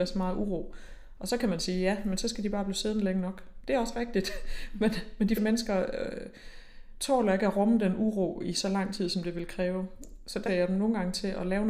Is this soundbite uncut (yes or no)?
no